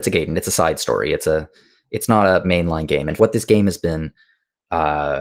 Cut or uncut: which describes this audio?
cut